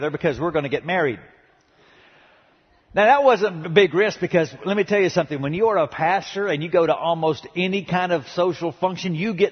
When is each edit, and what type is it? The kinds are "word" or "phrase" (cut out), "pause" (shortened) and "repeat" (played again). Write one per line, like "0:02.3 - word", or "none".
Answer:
none

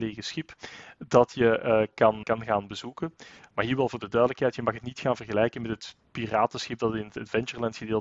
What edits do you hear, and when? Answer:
0:02.2 - word

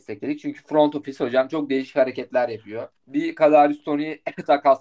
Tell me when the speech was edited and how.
0:03.0 - pause

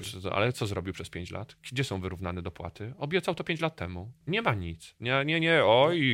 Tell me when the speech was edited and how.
0:04.2 - pause

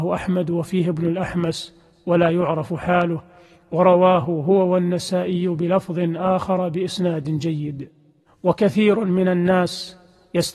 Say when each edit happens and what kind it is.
none

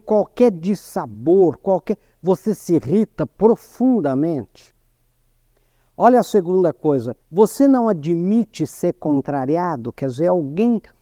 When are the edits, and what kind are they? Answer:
0:07.2 - pause

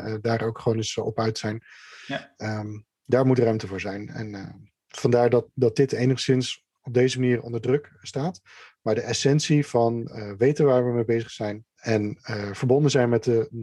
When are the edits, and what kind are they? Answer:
0:11.7 - pause

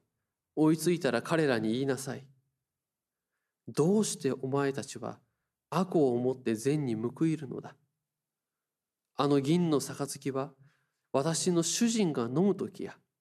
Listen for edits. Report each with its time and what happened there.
none

